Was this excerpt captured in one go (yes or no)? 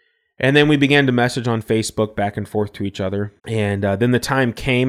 no